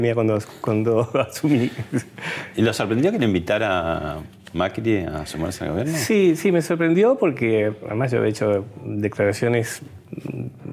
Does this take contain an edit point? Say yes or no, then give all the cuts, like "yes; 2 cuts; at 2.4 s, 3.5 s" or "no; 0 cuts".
no; 0 cuts